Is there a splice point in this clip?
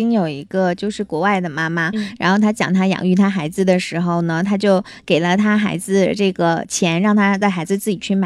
no; 0 cuts

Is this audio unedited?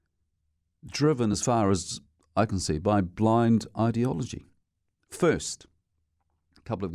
yes; 0 cuts

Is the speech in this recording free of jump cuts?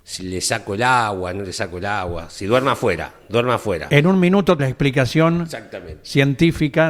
no; 1 cut; at 4.6 s

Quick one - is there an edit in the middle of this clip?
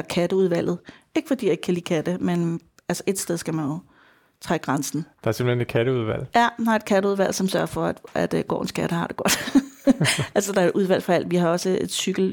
no; 0 cuts

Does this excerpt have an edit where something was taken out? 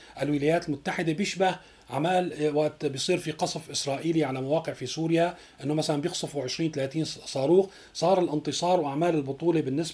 no; 0 cuts

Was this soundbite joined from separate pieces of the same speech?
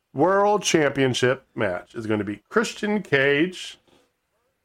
no; 0 cuts

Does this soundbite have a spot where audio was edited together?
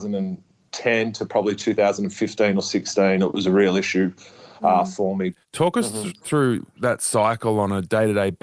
yes; 1 cut; at 5.4 s

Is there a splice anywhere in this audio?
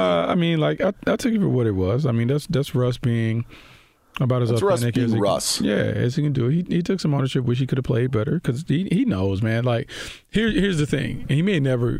no; 0 cuts

